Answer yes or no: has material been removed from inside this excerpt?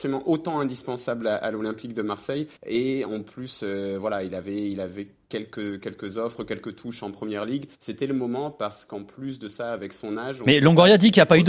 yes